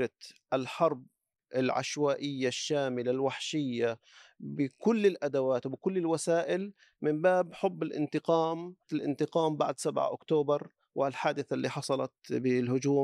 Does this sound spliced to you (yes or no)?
yes